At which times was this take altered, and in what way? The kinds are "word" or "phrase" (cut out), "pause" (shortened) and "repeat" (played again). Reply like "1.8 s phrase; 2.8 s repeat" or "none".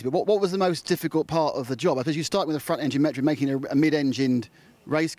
none